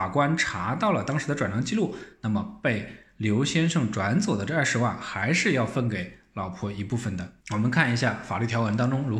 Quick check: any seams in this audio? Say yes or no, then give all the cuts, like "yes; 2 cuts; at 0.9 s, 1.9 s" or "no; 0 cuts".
yes; 1 cut; at 7.4 s